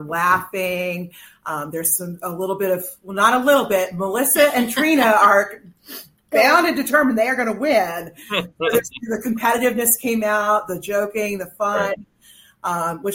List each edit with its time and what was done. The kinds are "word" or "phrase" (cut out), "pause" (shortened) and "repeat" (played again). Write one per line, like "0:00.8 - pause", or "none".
none